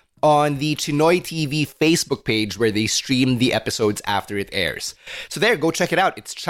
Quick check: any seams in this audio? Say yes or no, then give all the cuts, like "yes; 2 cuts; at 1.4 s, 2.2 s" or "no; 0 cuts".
no; 0 cuts